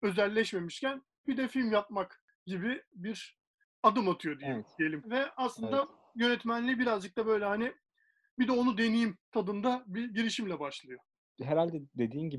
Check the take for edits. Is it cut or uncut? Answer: cut